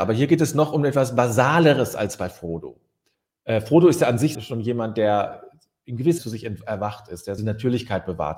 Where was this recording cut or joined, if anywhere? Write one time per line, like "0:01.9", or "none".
0:03.1
0:04.3
0:06.2
0:07.4